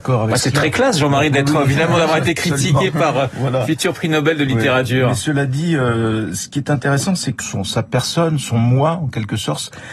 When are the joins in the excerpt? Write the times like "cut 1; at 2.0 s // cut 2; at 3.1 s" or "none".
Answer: cut 1; at 7.4 s